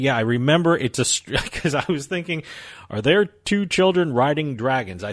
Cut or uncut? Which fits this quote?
uncut